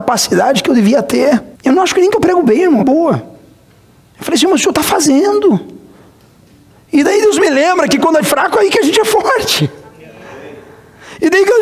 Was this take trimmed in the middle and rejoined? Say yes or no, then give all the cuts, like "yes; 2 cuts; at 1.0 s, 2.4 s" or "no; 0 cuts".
yes; 3 cuts; at 1.6 s, 2.8 s, 8.2 s